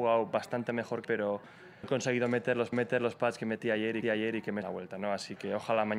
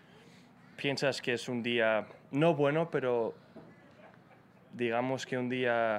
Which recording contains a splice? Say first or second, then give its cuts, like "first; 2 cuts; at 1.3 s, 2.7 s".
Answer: first; 5 cuts; at 1.0 s, 1.8 s, 2.7 s, 4.0 s, 4.6 s